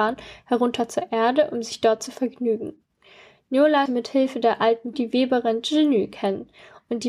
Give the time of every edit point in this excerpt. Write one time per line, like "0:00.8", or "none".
0:03.9
0:04.9